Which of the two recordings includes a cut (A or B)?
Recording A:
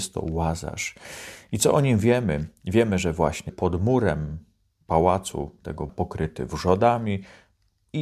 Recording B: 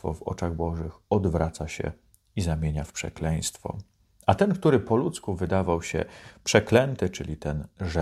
A